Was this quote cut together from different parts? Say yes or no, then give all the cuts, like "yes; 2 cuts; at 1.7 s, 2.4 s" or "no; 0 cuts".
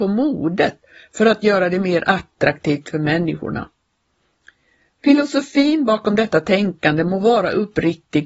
no; 0 cuts